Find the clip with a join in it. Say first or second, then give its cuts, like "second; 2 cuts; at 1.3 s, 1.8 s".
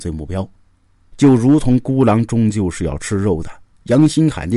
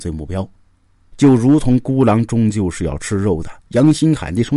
second; 1 cut; at 3.6 s